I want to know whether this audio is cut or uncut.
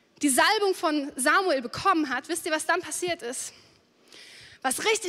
uncut